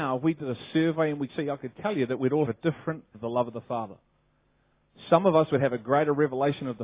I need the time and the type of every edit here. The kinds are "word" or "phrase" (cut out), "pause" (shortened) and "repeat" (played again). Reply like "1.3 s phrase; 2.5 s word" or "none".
1.3 s word; 2.5 s word; 3.1 s word